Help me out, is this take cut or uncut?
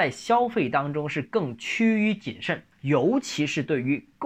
cut